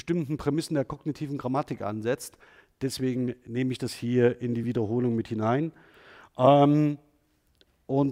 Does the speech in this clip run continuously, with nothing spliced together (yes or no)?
yes